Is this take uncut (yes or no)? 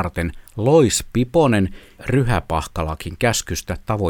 no